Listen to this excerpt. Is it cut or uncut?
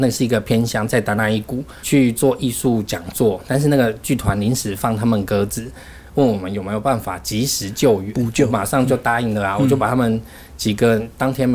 cut